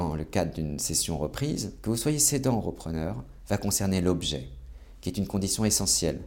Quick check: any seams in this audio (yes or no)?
no